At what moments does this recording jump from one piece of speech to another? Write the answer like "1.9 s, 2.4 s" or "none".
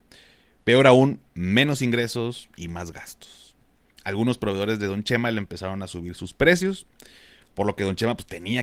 none